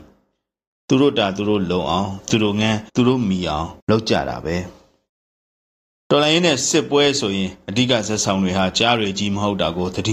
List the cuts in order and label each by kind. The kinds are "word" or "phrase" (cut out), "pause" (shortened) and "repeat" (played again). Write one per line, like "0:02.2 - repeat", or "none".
0:02.9 - pause
0:03.8 - pause